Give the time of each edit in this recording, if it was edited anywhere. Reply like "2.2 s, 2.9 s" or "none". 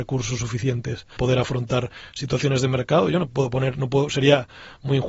1.2 s